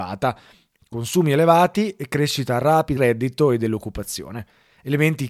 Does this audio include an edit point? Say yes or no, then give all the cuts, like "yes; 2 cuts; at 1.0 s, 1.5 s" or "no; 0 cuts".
yes; 1 cut; at 3.0 s